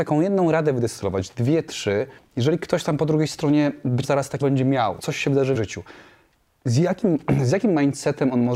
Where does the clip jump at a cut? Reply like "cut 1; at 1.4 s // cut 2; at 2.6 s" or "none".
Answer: cut 1; at 2.2 s // cut 2; at 4.0 s // cut 3; at 4.4 s // cut 4; at 5.0 s // cut 5; at 5.5 s

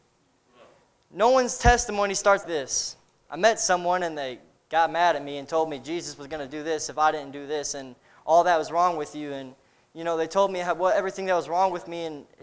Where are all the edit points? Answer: cut 1; at 2.4 s

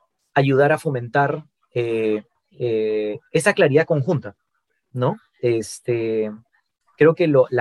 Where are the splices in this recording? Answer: cut 1; at 2.3 s

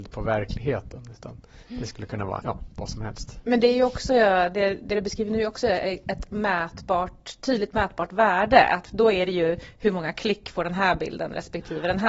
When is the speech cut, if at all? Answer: cut 1; at 2.4 s

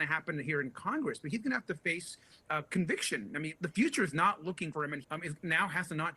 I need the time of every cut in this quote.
cut 1; at 2.5 s // cut 2; at 3.6 s // cut 3; at 4.7 s // cut 4; at 5.0 s

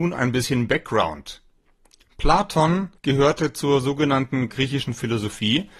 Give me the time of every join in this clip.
cut 1; at 3.0 s // cut 2; at 4.5 s

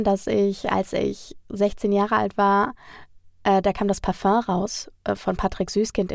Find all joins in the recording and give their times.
cut 1; at 5.0 s

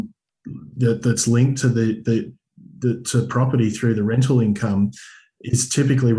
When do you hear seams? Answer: none

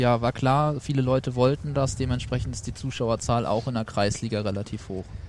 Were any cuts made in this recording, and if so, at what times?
none

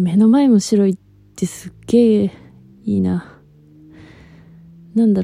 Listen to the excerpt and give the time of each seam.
none

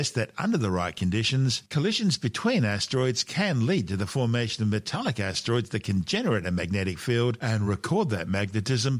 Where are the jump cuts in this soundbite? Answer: none

